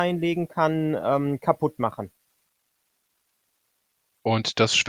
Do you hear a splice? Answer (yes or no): no